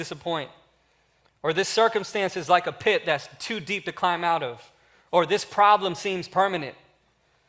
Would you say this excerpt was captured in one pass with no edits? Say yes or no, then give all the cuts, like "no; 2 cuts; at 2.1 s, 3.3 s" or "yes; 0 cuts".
yes; 0 cuts